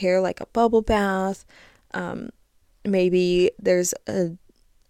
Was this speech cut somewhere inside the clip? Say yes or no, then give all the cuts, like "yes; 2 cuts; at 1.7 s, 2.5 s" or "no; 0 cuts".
no; 0 cuts